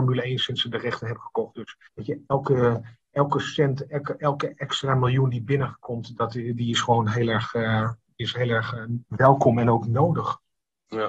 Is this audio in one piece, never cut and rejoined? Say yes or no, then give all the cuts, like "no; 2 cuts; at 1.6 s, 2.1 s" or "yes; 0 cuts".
no; 2 cuts; at 1.9 s, 9.0 s